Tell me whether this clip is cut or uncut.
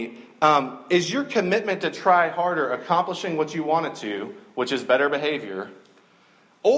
uncut